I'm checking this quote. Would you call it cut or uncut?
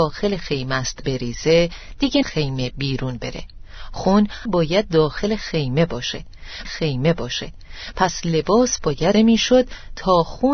cut